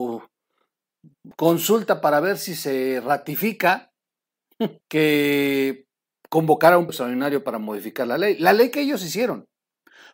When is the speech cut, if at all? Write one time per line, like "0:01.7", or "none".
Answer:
0:01.3
0:04.8
0:06.9